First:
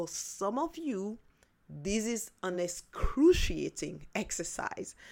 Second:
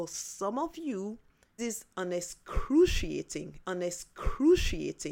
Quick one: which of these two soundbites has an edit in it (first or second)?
second